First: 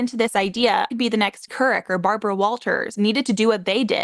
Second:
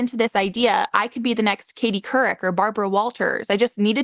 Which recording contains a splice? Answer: first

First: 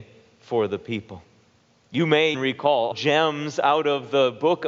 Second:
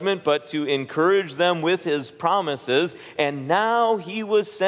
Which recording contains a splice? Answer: first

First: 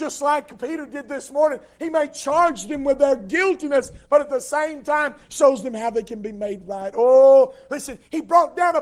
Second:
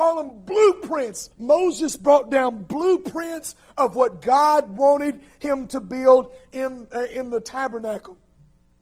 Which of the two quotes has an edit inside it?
second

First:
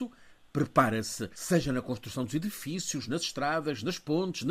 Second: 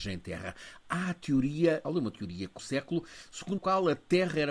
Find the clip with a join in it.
second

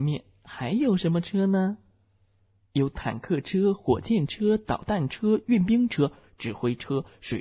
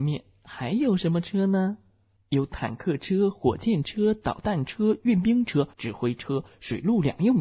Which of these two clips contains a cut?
second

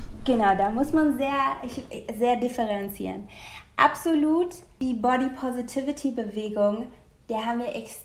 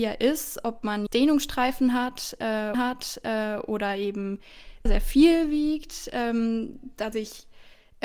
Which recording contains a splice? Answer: second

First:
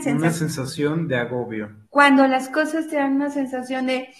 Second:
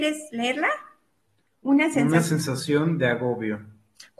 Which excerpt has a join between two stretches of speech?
first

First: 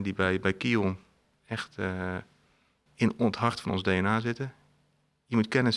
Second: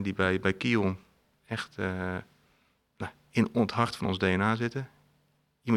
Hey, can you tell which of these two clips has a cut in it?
first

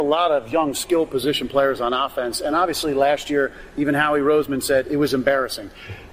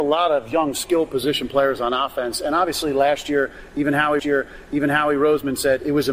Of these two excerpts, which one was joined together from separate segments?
second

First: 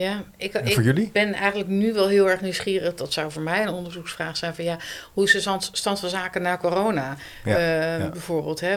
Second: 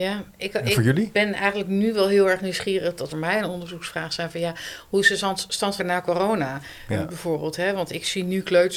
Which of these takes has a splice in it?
second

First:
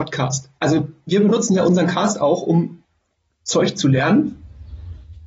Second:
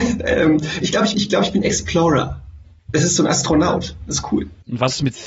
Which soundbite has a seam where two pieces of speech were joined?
second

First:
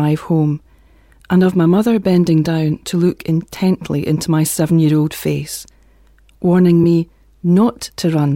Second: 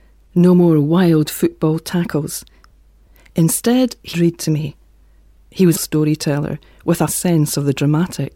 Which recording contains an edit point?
second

